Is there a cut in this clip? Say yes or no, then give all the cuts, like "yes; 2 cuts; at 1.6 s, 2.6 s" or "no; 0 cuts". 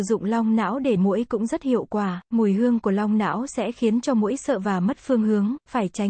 yes; 2 cuts; at 1.0 s, 2.2 s